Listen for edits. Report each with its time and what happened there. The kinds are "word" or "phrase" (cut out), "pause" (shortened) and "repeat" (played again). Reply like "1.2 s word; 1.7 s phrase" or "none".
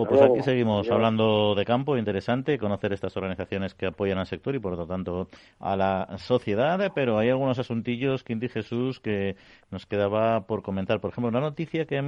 none